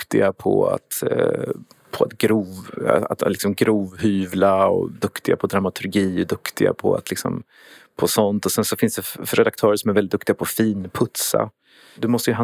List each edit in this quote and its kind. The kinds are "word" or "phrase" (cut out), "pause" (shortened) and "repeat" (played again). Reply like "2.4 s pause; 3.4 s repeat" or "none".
none